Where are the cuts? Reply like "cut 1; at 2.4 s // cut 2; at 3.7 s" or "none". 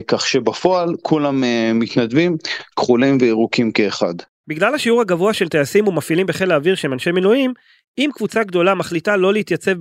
none